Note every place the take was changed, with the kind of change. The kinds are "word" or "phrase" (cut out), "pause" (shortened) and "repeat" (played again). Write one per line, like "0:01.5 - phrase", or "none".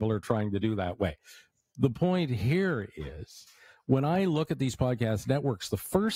none

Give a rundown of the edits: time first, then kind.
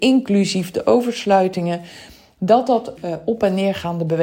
0:03.0 - word

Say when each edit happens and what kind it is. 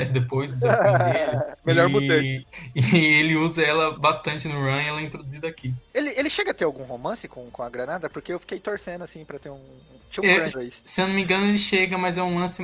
0:10.5 - word

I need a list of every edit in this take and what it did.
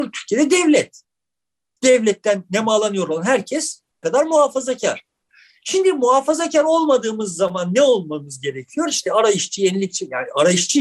0:04.0 - word

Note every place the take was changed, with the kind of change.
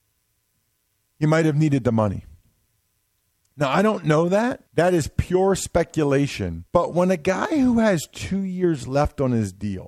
0:04.7 - pause
0:06.7 - pause

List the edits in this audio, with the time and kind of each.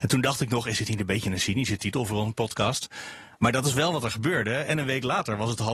none

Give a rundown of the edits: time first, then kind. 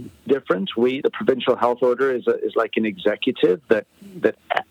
0:01.0 - word

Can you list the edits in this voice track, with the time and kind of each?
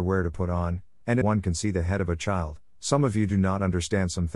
0:01.2 - phrase

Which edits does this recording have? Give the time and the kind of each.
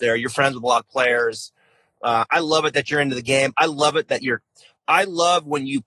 none

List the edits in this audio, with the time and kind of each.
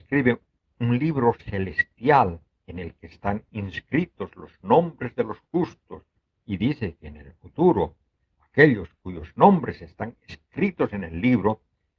none

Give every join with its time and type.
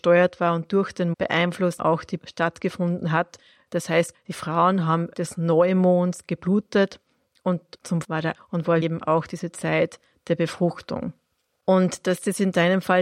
0:01.1 - word
0:01.8 - word
0:02.2 - word
0:04.1 - word
0:05.1 - word
0:08.0 - word
0:08.3 - word
0:08.8 - word

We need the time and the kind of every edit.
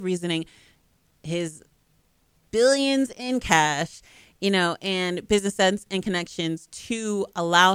none

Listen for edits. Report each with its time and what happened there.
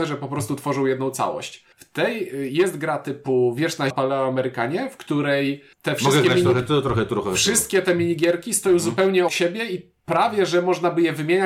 0:01.7 - pause
0:03.9 - word
0:05.7 - pause
0:09.3 - word
0:10.0 - pause

